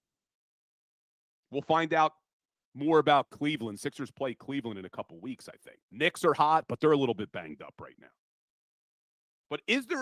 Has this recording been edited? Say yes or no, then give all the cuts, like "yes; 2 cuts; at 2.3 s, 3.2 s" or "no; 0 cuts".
yes; 1 cut; at 5.8 s